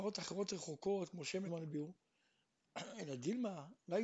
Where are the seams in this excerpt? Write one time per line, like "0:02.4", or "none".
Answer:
0:01.5